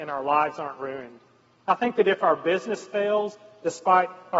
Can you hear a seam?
no; 0 cuts

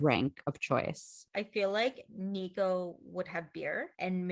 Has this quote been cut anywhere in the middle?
no; 0 cuts

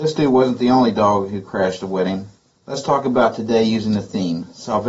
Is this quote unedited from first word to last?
no; 1 cut; at 2.4 s

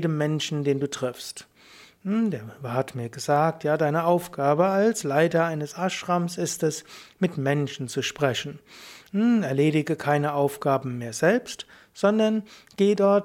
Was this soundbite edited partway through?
no; 0 cuts

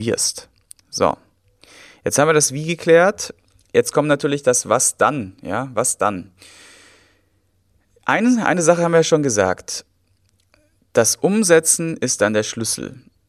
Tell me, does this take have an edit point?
no; 0 cuts

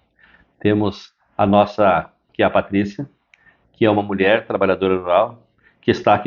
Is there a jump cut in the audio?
yes; 1 cut; at 2.3 s

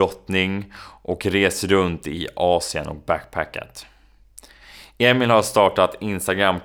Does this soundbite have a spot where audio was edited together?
no; 0 cuts

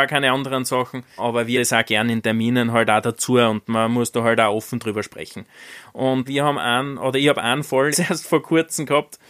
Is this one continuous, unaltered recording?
no; 4 cuts; at 1.2 s, 1.5 s, 6.3 s, 7.9 s

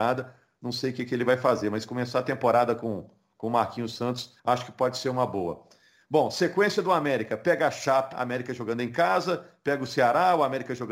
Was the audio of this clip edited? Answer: yes; 2 cuts; at 4.4 s, 8.1 s

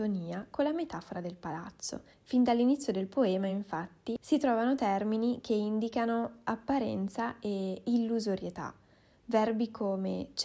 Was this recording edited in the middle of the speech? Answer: no; 0 cuts

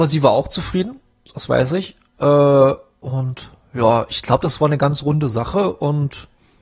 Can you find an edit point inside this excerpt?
no; 0 cuts

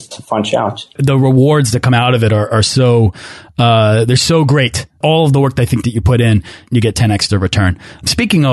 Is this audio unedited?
yes; 0 cuts

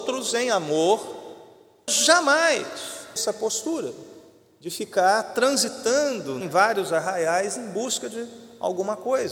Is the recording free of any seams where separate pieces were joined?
no; 3 cuts; at 1.9 s, 3.2 s, 6.4 s

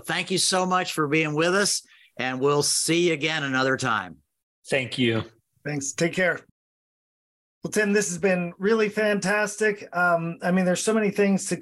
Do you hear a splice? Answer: no; 0 cuts

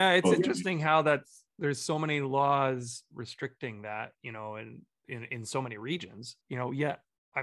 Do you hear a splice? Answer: yes; 1 cut; at 6.4 s

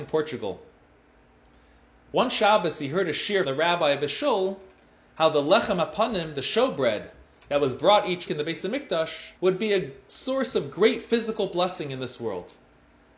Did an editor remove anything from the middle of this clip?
yes; 3 cuts; at 3.4 s, 8.3 s, 9.4 s

